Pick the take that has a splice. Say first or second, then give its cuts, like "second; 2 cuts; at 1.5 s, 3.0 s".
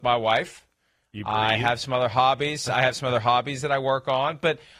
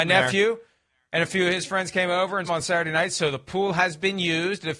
second; 1 cut; at 2.5 s